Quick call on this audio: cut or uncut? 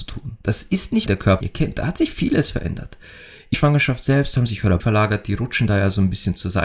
cut